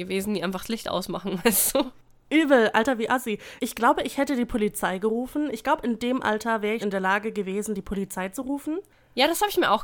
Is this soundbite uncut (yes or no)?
no